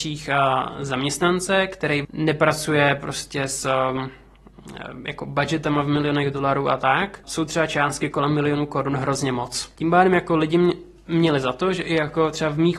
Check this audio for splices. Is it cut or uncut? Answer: uncut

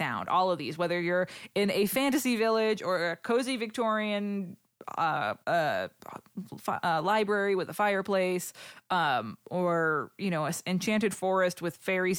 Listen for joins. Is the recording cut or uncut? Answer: cut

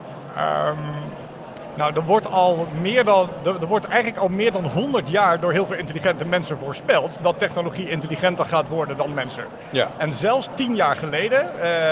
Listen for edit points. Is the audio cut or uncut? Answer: uncut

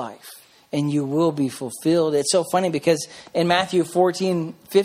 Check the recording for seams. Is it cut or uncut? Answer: uncut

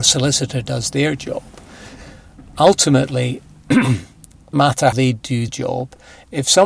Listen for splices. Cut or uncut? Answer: cut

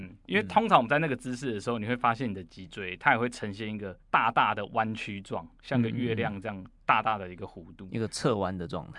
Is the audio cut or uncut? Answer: cut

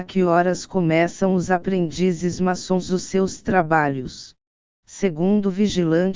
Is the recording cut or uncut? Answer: cut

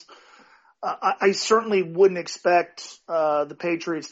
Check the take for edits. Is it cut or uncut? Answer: uncut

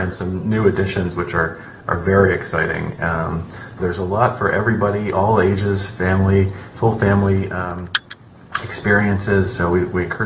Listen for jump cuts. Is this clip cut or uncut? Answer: cut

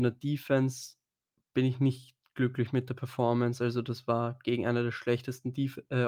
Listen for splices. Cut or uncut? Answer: uncut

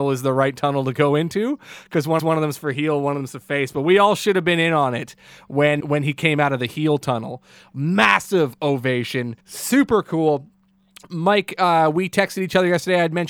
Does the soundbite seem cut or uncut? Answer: cut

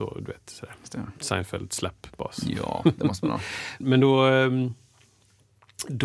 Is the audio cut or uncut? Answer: cut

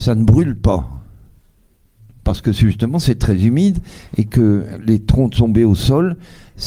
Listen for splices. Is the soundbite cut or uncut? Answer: uncut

